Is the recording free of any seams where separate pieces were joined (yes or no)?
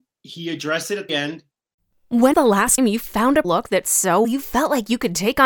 no